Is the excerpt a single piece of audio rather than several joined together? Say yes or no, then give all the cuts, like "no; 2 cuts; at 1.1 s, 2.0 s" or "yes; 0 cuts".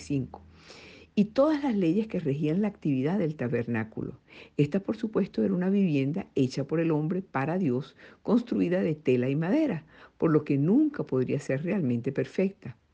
yes; 0 cuts